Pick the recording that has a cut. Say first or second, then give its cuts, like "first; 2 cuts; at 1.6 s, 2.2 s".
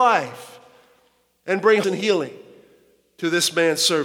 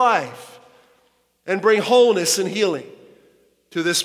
first; 1 cut; at 1.8 s